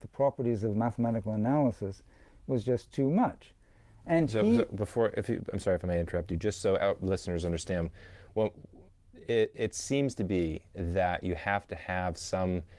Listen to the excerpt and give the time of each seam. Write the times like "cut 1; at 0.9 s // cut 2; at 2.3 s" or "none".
none